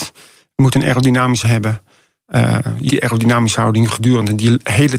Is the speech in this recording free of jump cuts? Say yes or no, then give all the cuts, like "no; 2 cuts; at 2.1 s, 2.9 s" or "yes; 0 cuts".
no; 2 cuts; at 1.4 s, 2.9 s